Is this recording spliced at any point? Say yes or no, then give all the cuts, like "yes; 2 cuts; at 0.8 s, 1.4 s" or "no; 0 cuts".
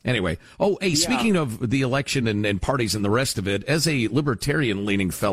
no; 0 cuts